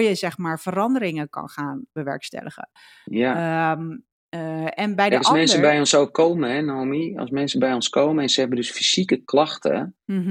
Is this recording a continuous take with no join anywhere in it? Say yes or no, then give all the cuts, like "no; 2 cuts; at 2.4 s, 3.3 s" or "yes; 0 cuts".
yes; 0 cuts